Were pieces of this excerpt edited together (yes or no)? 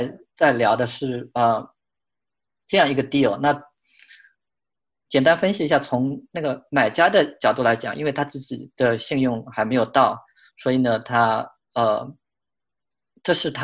no